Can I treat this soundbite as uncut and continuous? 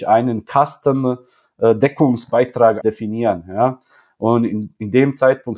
no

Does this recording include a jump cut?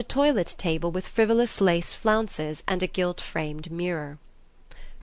no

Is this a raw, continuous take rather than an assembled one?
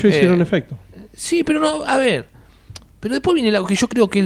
yes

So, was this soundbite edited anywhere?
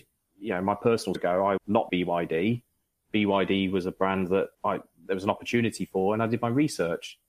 yes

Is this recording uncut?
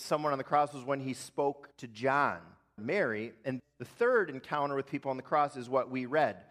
no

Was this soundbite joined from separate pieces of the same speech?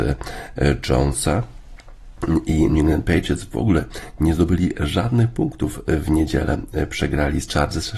no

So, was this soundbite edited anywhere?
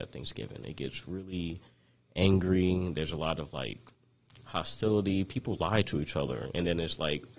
no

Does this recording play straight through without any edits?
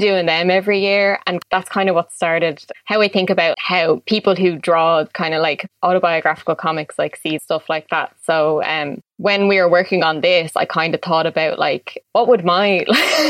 no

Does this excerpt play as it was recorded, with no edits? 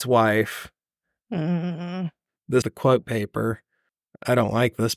no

